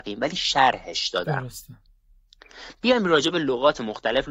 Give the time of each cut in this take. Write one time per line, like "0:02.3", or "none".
none